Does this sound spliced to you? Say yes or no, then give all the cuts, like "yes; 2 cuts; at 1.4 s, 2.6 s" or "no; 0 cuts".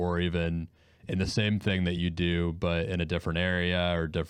no; 0 cuts